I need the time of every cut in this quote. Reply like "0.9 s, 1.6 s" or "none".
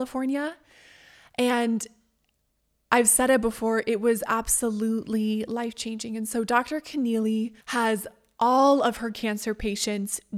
7.6 s